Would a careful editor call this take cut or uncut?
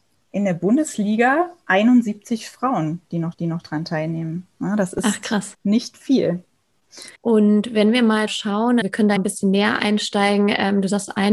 cut